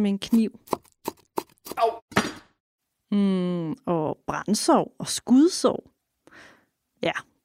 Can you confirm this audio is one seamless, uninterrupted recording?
yes; 0 cuts

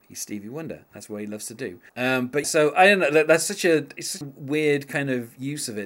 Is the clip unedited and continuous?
no; 3 cuts; at 1.9 s, 2.4 s, 4.2 s

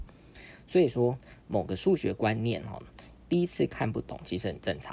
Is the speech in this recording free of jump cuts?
no; 1 cut; at 1.4 s

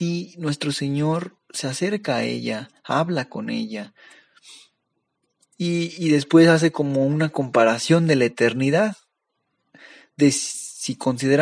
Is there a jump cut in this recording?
no; 0 cuts

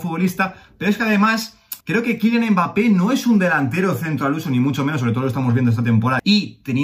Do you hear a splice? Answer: yes; 1 cut; at 1.8 s

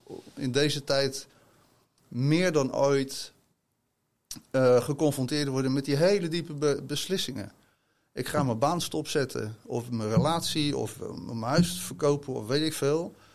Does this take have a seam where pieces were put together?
no; 0 cuts

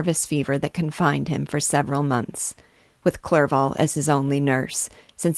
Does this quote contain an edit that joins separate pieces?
no; 0 cuts

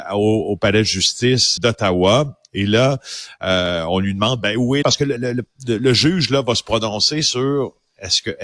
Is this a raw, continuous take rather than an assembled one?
no; 3 cuts; at 1.6 s, 4.8 s, 5.2 s

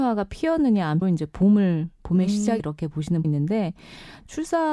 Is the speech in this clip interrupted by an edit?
yes; 3 cuts; at 1.0 s, 2.6 s, 3.2 s

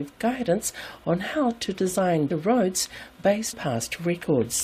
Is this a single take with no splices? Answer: no; 2 cuts; at 2.3 s, 3.5 s

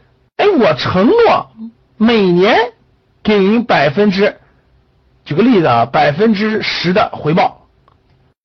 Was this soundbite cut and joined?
no; 0 cuts

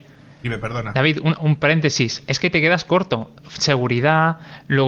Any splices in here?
no; 0 cuts

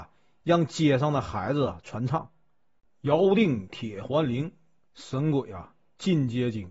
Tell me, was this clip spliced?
no; 0 cuts

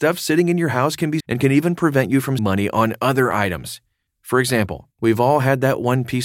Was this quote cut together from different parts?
yes; 4 cuts; at 1.2 s, 2.4 s, 4.1 s, 4.9 s

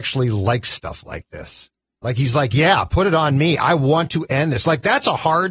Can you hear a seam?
no; 0 cuts

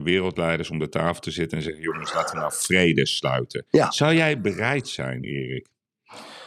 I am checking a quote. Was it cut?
no; 0 cuts

